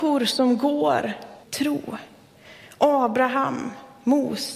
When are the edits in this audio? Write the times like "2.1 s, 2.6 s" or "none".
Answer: 1.4 s